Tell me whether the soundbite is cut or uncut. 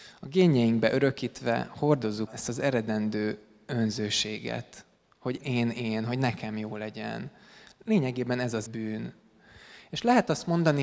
cut